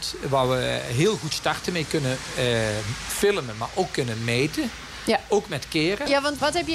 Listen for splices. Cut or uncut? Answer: uncut